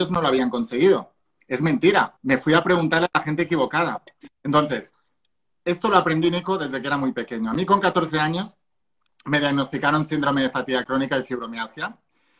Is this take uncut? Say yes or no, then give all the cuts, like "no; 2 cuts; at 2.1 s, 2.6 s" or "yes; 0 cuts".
no; 1 cut; at 2.2 s